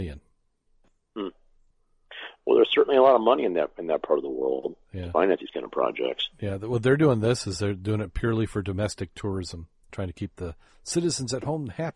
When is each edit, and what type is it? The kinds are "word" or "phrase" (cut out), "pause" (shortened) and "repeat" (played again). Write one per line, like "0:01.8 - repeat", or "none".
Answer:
0:09.9 - word